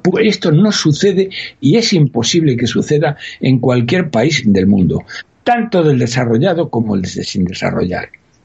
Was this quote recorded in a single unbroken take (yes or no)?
yes